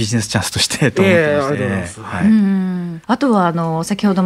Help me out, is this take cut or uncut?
cut